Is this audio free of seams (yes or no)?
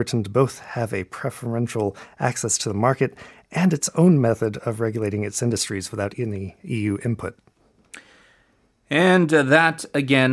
yes